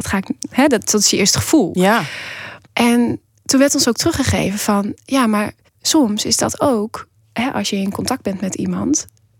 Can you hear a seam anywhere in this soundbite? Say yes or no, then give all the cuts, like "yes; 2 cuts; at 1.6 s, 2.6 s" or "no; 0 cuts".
yes; 3 cuts; at 2.6 s, 5.7 s, 7.2 s